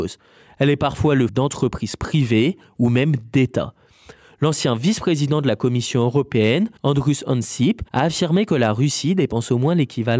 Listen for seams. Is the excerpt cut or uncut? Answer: cut